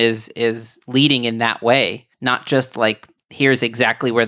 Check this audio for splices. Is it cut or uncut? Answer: cut